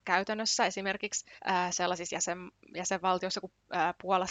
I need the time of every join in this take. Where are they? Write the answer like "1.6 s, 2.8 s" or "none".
1.4 s

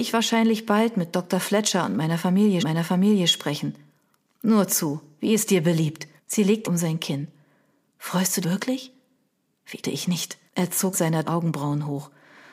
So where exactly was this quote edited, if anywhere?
2.6 s, 6.2 s, 6.6 s, 8.4 s, 9.8 s, 10.5 s, 10.9 s, 11.2 s

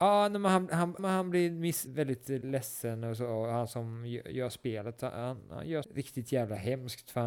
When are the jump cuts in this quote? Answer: 1.0 s, 1.9 s, 5.8 s

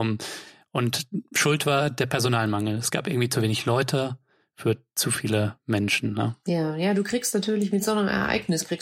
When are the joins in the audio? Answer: none

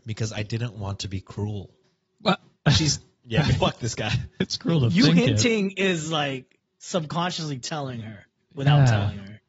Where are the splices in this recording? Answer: none

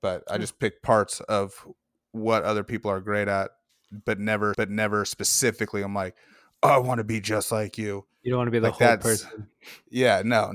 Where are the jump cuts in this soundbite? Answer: 4.5 s

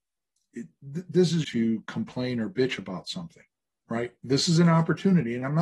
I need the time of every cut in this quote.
1.4 s

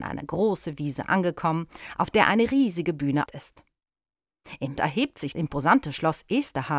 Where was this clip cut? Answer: 3.3 s, 4.8 s, 5.3 s

